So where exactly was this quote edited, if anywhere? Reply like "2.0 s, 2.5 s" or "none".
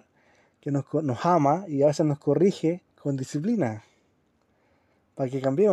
2.9 s